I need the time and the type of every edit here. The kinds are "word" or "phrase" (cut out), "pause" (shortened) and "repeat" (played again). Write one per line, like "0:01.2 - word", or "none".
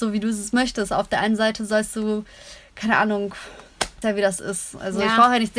0:04.0 - word